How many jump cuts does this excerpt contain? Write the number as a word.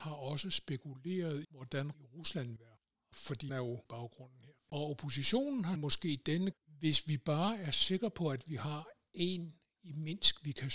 eight